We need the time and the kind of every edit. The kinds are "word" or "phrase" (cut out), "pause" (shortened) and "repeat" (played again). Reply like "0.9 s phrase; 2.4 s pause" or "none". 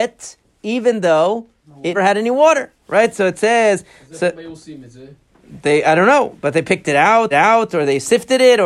1.9 s word; 7.3 s repeat

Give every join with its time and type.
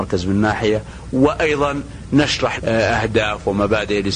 2.6 s word

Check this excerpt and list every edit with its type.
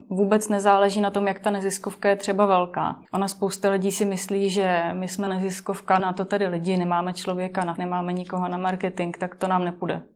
3.0 s pause; 5.3 s word; 6.0 s word; 7.8 s word

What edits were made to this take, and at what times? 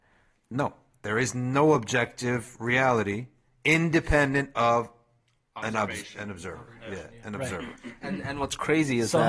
none

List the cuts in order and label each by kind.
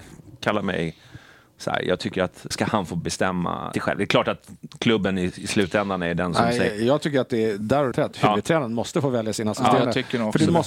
2.5 s word; 3.7 s word; 7.9 s word

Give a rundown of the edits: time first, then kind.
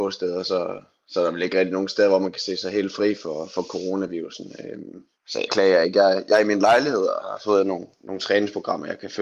5.5 s phrase

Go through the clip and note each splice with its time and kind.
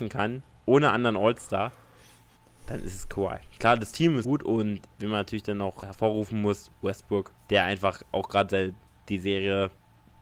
4.2 s word; 5.8 s word; 7.4 s pause

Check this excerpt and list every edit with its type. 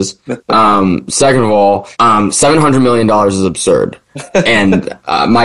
1.9 s pause

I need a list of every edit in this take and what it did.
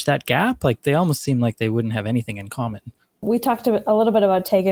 none

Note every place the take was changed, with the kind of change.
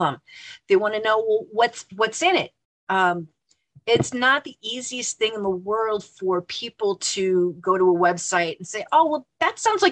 none

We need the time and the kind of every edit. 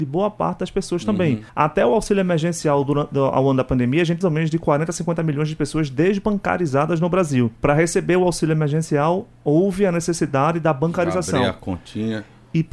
1.5 s pause; 4.2 s phrase; 7.6 s pause

